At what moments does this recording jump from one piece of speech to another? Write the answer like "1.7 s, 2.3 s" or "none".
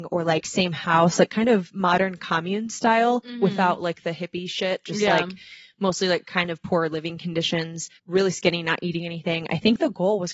8.0 s